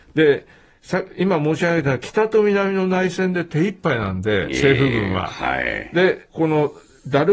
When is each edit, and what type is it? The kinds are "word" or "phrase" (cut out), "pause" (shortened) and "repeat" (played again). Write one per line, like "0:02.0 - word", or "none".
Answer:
0:06.3 - phrase